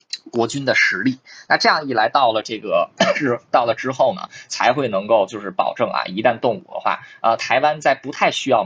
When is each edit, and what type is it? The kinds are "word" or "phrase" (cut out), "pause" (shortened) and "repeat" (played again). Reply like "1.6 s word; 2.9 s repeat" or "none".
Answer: none

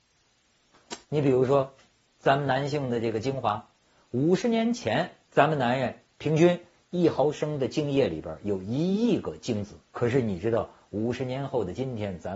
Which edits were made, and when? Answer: 1.0 s pause; 1.9 s pause; 5.2 s pause; 9.9 s pause

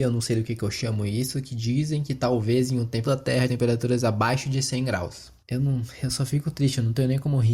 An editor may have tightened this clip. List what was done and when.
3.0 s word; 3.5 s word

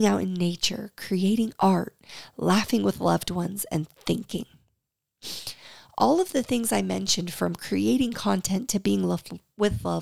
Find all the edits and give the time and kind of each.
none

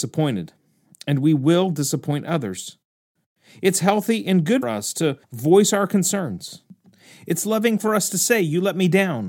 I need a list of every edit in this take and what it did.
4.6 s word; 5.2 s pause

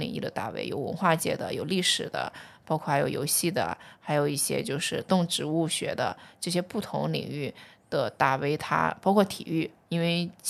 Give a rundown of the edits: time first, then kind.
none

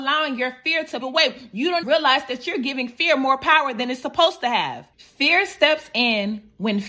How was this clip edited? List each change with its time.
1.0 s word; 1.8 s word; 4.9 s pause

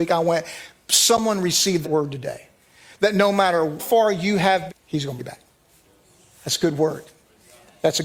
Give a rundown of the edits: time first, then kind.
1.8 s word; 3.8 s word; 4.7 s phrase; 5.2 s word

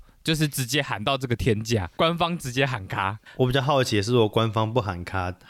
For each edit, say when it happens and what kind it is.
1.9 s pause

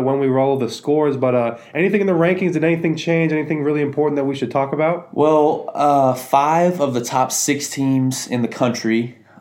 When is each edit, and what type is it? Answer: none

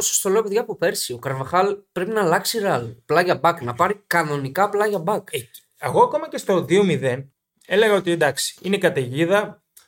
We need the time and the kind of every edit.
7.3 s pause; 8.6 s pause

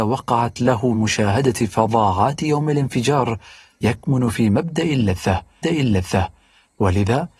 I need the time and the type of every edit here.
0.9 s word; 5.6 s repeat

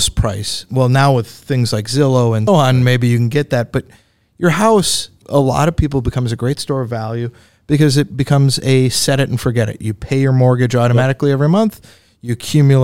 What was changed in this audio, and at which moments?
2.5 s word; 5.2 s word

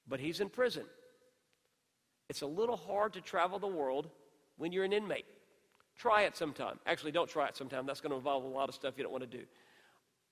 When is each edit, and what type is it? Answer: none

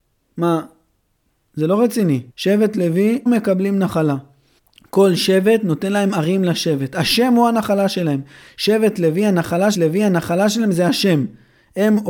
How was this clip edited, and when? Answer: 2.3 s pause; 3.3 s word; 4.6 s pause; 9.7 s repeat

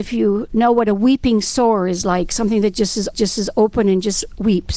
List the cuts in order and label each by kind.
3.1 s repeat

